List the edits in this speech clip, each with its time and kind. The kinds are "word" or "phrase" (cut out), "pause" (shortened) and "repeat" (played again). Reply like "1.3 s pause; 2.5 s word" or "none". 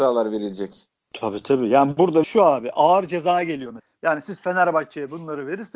2.2 s phrase